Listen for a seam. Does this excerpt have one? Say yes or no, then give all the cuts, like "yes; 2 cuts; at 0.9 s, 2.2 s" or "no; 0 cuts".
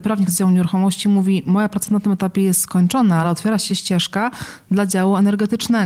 no; 0 cuts